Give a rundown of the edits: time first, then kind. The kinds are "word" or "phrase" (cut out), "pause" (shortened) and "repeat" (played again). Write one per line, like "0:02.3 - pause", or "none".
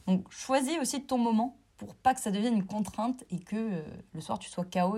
0:01.7 - pause
0:04.1 - pause